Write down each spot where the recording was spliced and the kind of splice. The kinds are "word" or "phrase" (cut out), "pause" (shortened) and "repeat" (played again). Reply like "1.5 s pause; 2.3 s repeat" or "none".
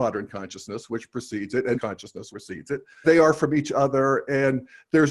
1.7 s word; 2.3 s word; 3.0 s word